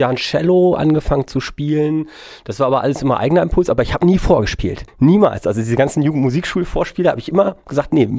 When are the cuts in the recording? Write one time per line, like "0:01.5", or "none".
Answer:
0:04.9